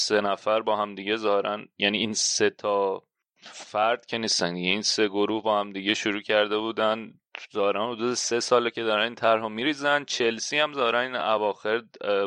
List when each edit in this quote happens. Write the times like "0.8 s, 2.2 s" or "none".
none